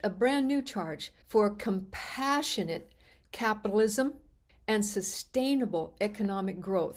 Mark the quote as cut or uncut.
cut